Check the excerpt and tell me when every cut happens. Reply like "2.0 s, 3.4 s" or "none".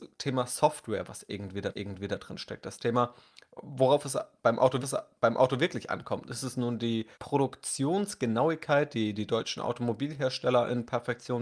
1.7 s, 4.8 s, 7.1 s